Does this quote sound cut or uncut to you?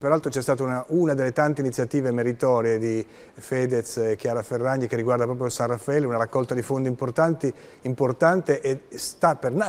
uncut